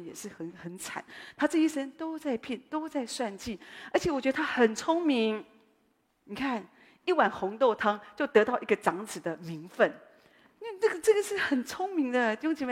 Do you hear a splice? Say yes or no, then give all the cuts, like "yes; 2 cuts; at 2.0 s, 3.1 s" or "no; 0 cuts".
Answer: no; 0 cuts